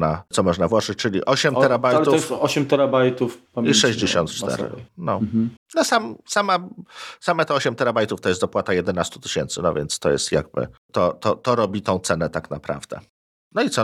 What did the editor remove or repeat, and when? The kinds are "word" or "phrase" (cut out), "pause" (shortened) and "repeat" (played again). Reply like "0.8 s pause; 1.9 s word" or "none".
3.5 s pause; 5.6 s pause; 10.8 s pause